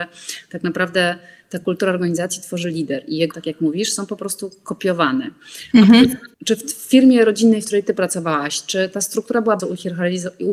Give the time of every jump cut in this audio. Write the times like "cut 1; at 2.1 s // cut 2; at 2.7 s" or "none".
cut 1; at 3.3 s // cut 2; at 6.3 s // cut 3; at 9.6 s